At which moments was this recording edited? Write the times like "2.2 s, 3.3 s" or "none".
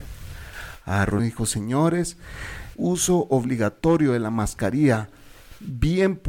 1.2 s, 2.8 s